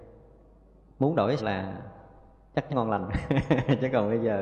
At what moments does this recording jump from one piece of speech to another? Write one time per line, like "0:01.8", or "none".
0:01.4
0:02.7